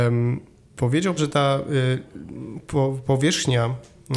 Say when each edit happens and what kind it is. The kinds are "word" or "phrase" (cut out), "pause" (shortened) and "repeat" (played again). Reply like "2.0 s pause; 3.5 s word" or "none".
1.2 s word